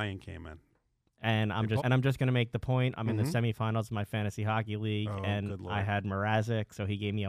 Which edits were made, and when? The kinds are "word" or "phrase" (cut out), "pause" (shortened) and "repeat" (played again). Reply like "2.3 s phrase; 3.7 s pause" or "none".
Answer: 1.8 s word